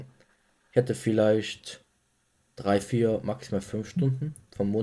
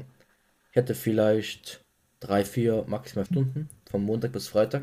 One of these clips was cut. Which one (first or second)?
second